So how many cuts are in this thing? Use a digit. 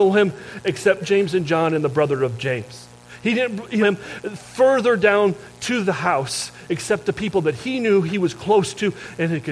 2